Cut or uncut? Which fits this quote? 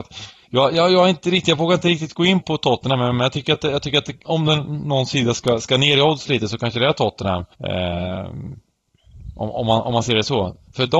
cut